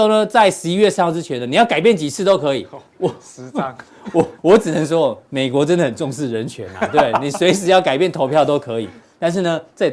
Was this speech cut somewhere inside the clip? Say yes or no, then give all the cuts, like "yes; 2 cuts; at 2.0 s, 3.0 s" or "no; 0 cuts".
yes; 2 cuts; at 2.9 s, 4.4 s